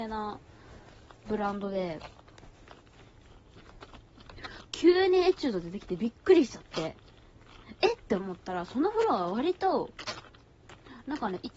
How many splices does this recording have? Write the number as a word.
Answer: one